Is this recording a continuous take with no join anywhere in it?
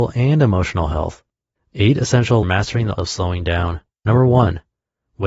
no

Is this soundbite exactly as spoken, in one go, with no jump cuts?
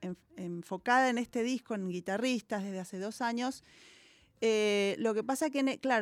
yes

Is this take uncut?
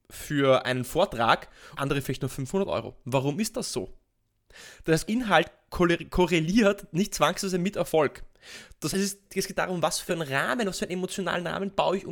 no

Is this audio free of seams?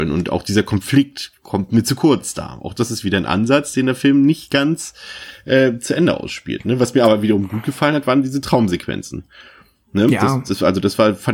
yes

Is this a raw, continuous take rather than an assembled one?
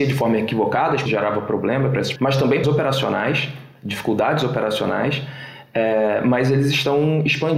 no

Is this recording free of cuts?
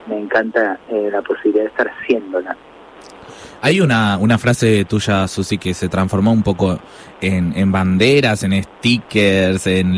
yes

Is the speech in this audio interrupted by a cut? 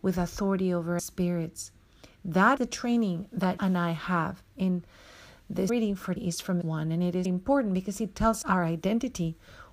yes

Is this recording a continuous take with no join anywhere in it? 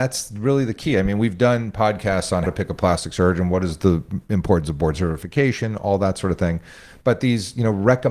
no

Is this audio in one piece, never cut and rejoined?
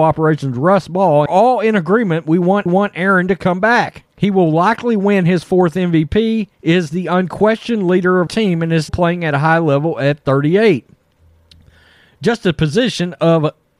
no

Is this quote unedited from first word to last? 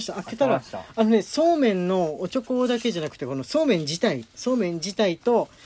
yes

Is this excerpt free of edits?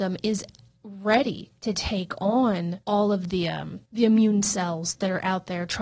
no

